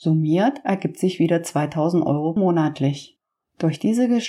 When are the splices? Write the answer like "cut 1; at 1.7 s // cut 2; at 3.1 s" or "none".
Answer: cut 1; at 2.4 s